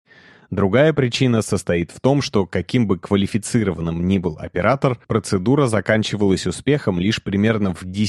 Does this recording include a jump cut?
yes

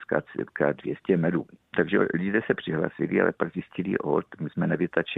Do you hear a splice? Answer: no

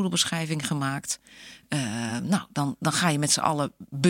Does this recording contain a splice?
no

